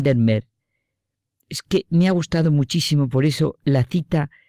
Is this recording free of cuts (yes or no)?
yes